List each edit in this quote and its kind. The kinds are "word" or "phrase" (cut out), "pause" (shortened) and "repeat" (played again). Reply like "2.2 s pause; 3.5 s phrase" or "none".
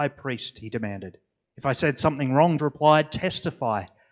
1.4 s pause; 2.6 s word